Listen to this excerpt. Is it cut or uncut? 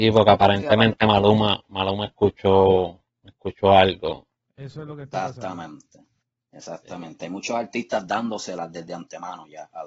uncut